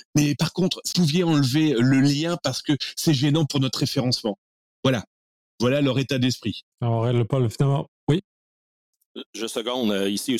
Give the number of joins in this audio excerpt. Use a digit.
2